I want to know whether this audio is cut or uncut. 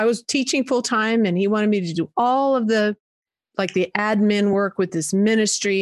uncut